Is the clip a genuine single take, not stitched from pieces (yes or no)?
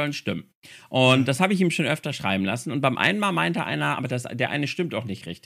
no